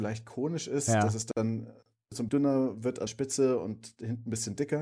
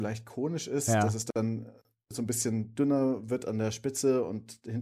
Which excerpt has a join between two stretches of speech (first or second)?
first